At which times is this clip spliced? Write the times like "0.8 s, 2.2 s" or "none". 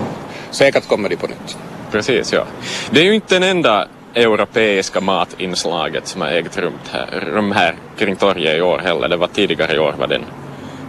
none